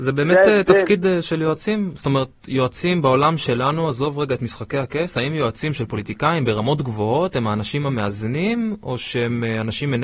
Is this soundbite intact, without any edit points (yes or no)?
yes